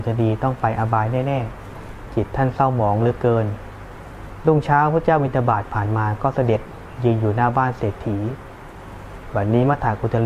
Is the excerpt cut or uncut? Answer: uncut